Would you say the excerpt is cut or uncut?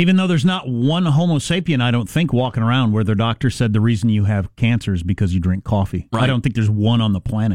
uncut